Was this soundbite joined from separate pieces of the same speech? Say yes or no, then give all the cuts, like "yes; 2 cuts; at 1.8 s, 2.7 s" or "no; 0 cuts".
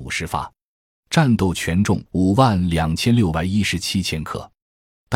yes; 1 cut; at 2.1 s